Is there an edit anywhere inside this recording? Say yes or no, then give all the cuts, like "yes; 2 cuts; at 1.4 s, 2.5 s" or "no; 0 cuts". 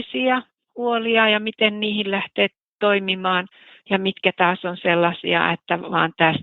no; 0 cuts